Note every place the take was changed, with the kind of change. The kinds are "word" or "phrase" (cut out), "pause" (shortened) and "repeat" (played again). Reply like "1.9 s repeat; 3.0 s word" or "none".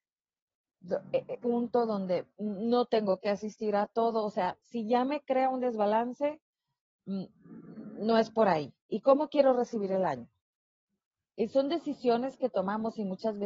1.3 s word